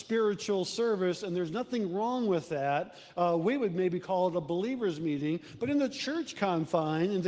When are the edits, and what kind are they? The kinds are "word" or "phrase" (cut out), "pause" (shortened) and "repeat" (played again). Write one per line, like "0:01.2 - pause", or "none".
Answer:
none